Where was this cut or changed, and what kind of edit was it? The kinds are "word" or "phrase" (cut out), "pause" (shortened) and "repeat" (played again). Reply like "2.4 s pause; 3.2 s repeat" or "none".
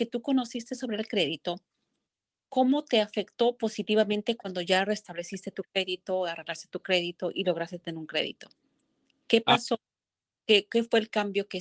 2.0 s pause